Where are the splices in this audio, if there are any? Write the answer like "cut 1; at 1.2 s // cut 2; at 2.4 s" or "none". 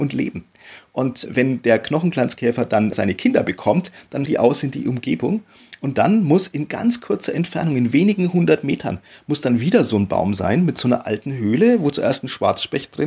cut 1; at 1.3 s // cut 2; at 2.9 s // cut 3; at 4.3 s